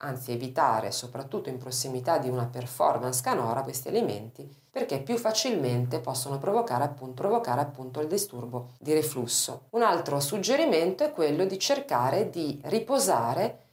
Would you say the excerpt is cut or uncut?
cut